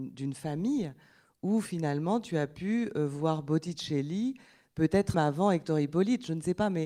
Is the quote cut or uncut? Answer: cut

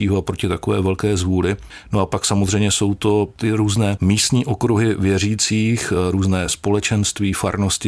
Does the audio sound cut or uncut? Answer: uncut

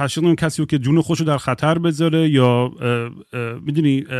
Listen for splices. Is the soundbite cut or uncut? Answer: uncut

